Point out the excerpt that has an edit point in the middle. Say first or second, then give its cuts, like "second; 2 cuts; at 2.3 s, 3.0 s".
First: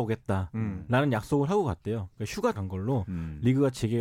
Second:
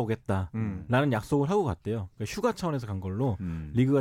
first; 1 cut; at 2.5 s